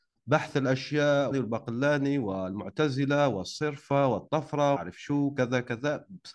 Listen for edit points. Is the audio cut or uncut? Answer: cut